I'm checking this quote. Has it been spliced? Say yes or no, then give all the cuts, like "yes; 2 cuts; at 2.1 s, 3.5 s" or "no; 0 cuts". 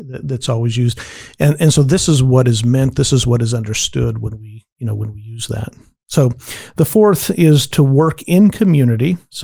no; 0 cuts